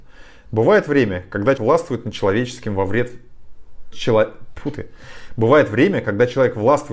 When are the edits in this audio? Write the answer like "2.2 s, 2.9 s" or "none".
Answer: 1.6 s, 3.9 s